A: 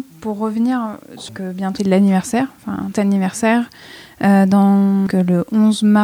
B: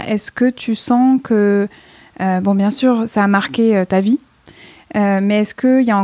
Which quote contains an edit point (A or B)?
A